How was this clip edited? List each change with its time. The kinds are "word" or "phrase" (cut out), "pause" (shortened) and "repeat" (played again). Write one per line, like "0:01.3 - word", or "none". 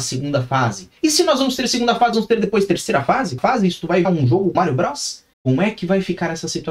0:01.0 - pause
0:02.1 - word
0:03.4 - word
0:04.0 - word
0:04.5 - word
0:05.3 - pause